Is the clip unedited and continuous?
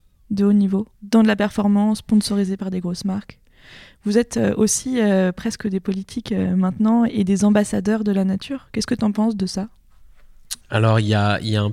no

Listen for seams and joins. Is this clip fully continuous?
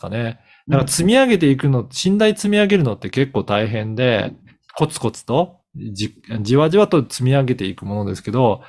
yes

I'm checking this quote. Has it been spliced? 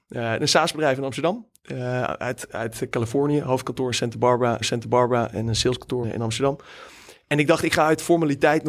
yes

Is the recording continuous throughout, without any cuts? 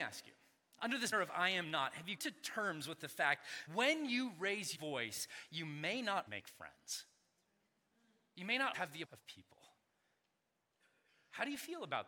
no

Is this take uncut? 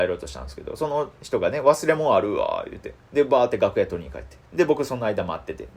no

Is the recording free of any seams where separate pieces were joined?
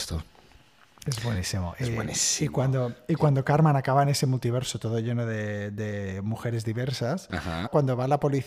yes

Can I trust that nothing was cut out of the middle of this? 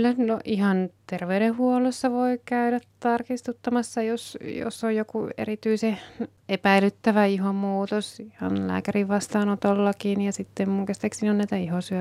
yes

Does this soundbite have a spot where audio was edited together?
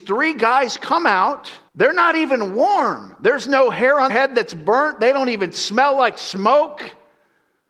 yes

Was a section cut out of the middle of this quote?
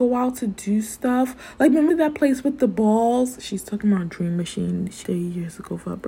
yes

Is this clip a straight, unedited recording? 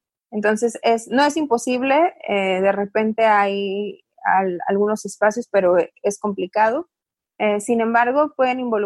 yes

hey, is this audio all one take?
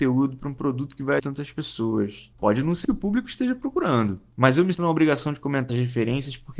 no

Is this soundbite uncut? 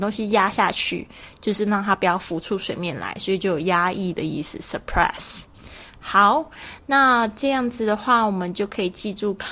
yes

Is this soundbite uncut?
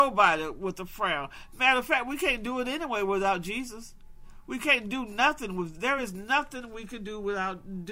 yes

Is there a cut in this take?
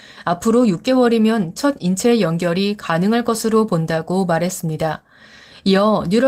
no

